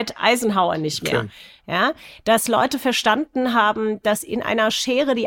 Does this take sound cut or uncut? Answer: uncut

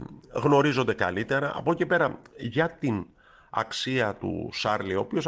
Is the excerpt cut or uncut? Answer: uncut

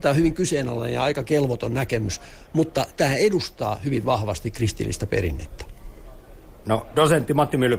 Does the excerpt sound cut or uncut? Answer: uncut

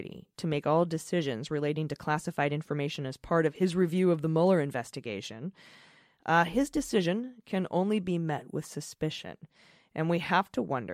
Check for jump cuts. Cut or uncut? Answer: uncut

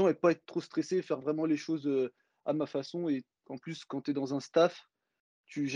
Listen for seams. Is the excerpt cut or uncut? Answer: uncut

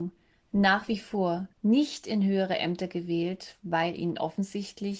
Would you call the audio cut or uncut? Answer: cut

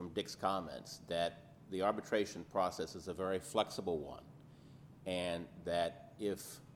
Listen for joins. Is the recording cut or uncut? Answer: uncut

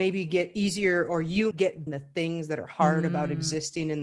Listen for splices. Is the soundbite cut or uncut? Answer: cut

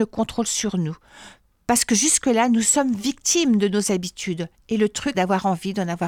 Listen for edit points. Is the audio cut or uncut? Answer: cut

